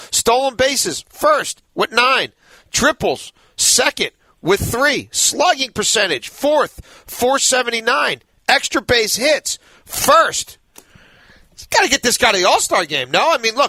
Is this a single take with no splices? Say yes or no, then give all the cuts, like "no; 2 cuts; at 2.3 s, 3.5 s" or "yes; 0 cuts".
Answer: yes; 0 cuts